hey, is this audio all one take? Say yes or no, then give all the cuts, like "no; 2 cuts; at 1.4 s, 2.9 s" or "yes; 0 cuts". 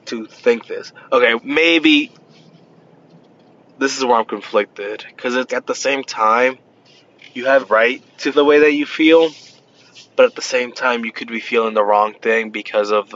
no; 4 cuts; at 1.4 s, 5.5 s, 7.6 s, 8.3 s